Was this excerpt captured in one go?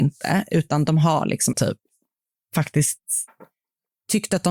no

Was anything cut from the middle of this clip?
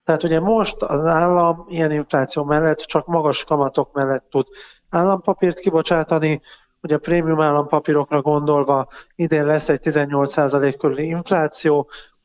no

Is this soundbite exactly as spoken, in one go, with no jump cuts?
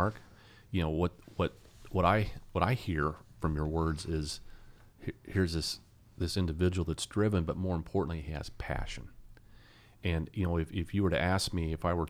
yes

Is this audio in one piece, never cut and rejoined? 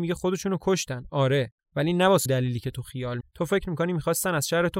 no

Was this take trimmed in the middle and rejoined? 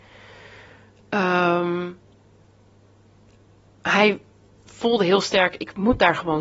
no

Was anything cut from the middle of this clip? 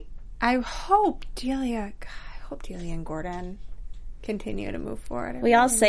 no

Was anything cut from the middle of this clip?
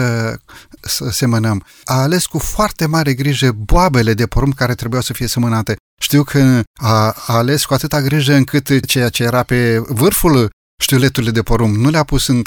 yes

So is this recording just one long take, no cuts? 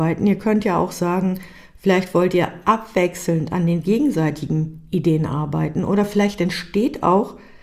yes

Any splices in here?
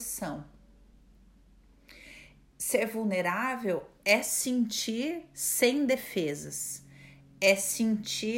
no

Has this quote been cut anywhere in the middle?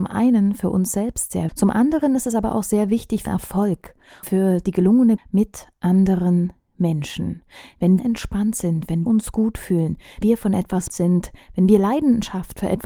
yes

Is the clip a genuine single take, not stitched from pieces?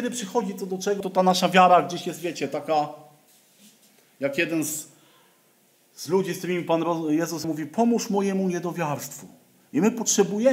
no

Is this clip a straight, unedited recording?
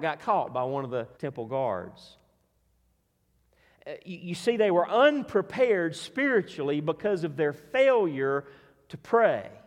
no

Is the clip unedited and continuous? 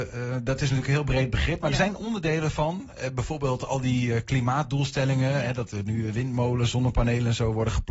yes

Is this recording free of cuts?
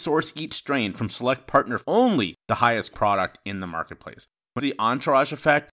no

